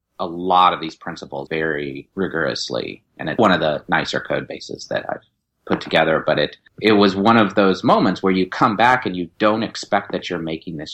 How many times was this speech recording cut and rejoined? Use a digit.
2